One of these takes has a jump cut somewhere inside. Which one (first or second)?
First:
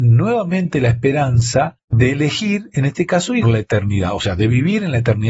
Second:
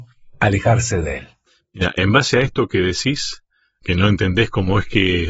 first